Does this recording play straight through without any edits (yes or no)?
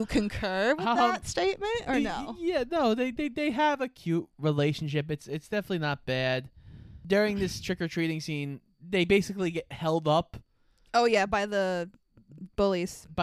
yes